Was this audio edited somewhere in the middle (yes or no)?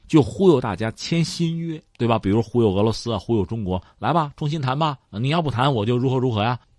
yes